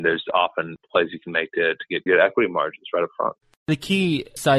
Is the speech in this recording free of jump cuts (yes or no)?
no